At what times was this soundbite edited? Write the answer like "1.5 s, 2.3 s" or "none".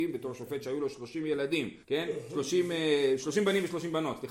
1.8 s